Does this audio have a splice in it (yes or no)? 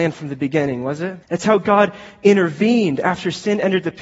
yes